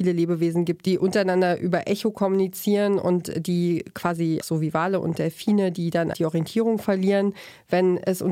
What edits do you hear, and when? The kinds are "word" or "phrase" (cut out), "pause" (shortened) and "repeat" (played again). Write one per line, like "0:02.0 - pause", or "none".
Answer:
0:04.4 - word
0:06.1 - word